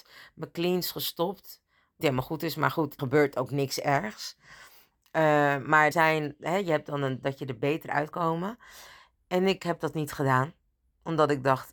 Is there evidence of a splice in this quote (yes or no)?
yes